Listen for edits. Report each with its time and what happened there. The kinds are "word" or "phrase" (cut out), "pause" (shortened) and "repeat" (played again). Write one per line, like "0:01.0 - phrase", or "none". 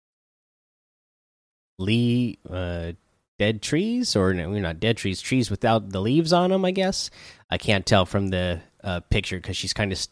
none